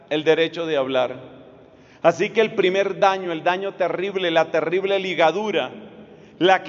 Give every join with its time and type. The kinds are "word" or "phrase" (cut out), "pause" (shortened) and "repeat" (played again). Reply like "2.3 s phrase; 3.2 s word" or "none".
none